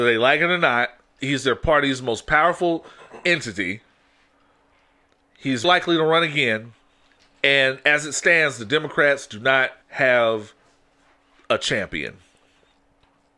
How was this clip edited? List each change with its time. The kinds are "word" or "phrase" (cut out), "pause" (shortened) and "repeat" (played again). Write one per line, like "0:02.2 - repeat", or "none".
0:01.2 - word
0:05.6 - word
0:07.2 - pause
0:09.8 - pause